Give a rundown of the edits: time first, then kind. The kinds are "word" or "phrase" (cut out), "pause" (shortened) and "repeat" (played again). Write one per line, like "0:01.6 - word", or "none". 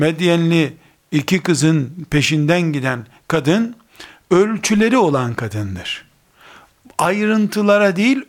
none